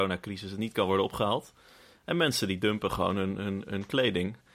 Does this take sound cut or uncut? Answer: uncut